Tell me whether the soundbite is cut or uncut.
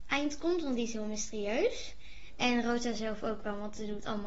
uncut